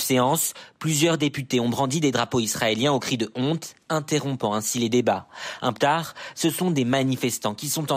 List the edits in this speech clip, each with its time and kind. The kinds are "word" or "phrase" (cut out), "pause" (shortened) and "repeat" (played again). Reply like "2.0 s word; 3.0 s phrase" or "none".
5.8 s word